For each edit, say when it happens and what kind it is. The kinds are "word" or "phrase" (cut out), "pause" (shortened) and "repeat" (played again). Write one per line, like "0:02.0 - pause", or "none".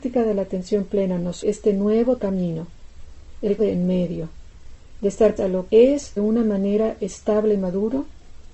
0:01.4 - word
0:02.2 - word
0:03.6 - word
0:05.4 - word
0:05.7 - word
0:06.2 - word